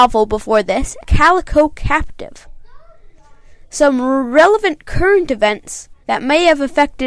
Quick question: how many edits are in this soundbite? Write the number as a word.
two